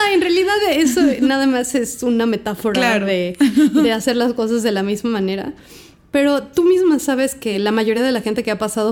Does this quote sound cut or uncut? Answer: uncut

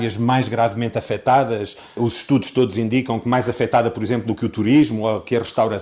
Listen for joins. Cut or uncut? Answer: uncut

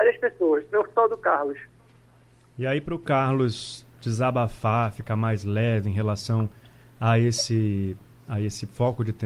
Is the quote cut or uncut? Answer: uncut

